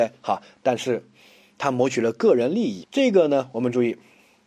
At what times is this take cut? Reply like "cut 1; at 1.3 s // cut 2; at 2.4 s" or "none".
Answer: cut 1; at 2.8 s